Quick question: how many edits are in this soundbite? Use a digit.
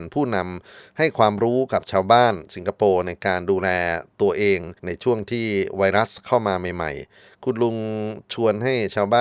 1